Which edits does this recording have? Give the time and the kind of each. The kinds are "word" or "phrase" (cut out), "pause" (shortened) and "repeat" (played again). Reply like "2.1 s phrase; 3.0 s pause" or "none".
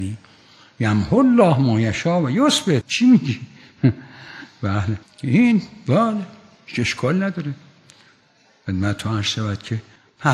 2.8 s word; 5.0 s pause